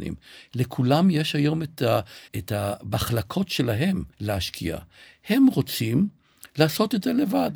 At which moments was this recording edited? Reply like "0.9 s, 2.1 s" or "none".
2.3 s, 4.1 s